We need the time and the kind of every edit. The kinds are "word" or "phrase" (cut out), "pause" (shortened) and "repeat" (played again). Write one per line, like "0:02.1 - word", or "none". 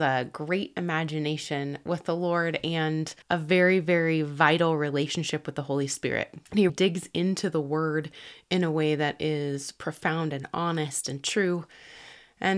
0:03.2 - pause
0:06.7 - word